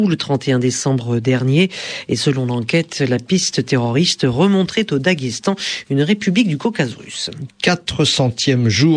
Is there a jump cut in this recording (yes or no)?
yes